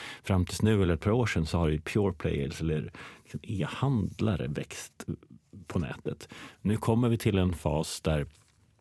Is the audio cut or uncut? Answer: cut